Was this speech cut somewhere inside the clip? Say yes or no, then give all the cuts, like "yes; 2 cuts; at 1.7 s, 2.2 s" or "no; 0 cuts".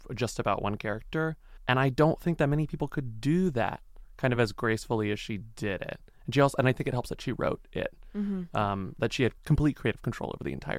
no; 0 cuts